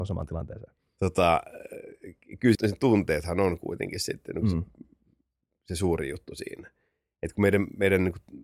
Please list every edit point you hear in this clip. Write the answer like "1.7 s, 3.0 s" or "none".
2.5 s